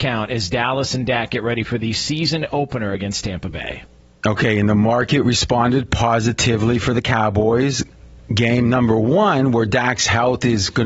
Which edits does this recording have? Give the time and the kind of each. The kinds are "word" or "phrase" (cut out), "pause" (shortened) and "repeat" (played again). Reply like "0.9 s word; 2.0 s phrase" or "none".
none